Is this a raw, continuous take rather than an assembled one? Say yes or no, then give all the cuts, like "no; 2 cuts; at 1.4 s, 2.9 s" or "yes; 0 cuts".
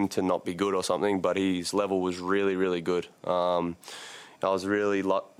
yes; 0 cuts